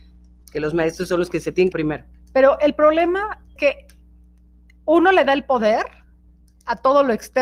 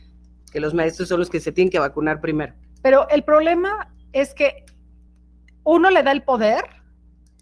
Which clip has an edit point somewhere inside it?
first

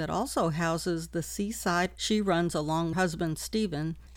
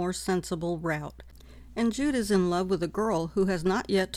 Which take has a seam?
first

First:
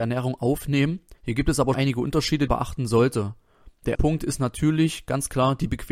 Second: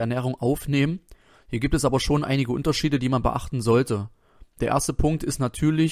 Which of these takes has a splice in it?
first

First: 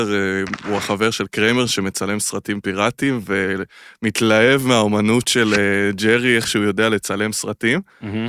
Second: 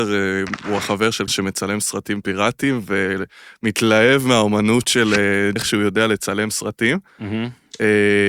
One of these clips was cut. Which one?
second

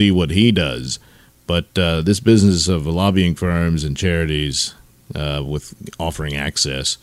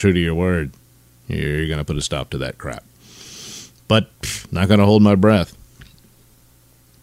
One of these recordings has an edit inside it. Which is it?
second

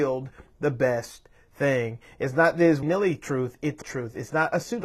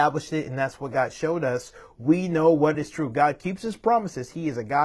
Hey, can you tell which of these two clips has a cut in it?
first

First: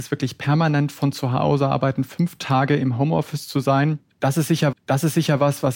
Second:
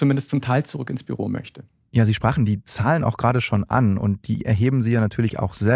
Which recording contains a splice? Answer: first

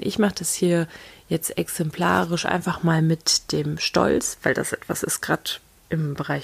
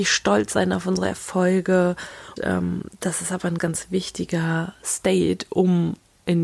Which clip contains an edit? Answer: second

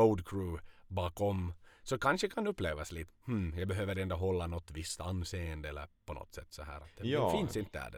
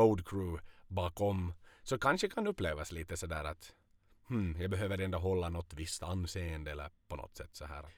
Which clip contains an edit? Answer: first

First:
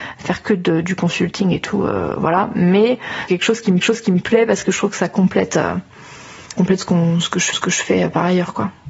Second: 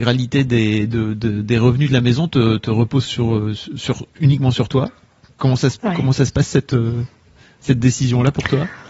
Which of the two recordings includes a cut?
first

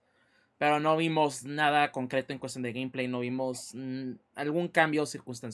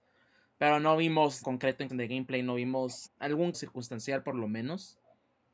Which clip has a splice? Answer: second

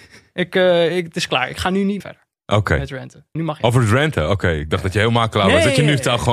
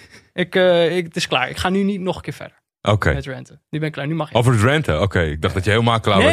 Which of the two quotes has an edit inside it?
first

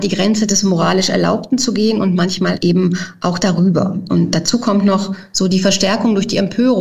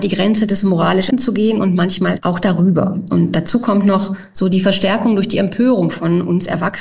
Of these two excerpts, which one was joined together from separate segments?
second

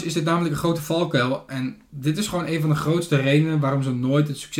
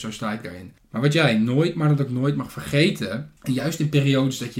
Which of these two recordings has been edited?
second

